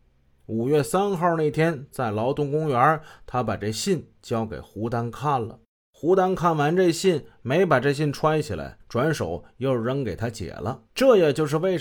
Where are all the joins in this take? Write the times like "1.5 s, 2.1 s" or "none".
5.7 s, 8.8 s, 10.9 s

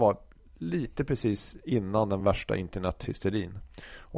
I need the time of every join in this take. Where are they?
none

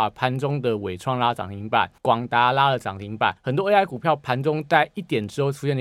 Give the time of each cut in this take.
2.0 s, 3.4 s

